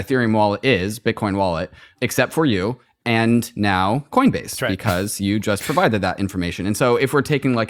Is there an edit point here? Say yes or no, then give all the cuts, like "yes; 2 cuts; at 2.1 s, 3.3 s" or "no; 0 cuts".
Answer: no; 0 cuts